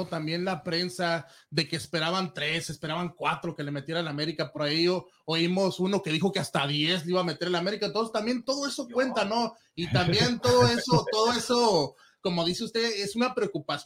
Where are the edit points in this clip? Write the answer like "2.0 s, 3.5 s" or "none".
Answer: none